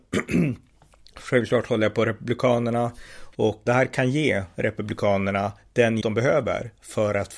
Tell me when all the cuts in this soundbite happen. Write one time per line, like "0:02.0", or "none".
0:03.7
0:06.0